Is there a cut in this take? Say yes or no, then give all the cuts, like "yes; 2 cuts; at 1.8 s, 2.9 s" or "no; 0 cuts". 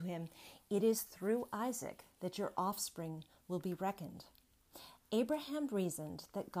no; 0 cuts